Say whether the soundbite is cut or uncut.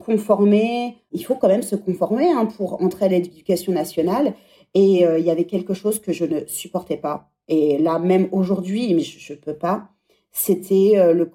uncut